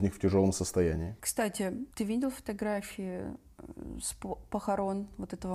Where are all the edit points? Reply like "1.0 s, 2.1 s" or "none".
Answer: 1.9 s